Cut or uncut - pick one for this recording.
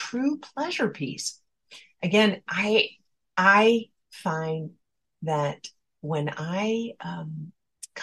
uncut